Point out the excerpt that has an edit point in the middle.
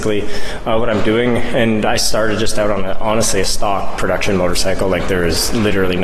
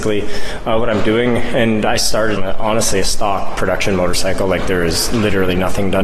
second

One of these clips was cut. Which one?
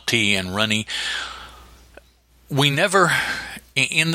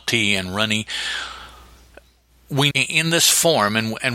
second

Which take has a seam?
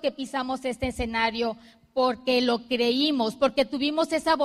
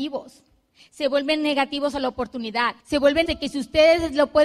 second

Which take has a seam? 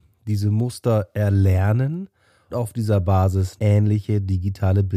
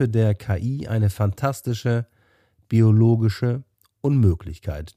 first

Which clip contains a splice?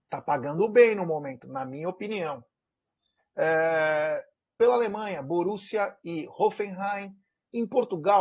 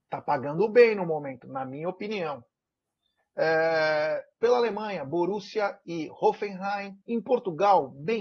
second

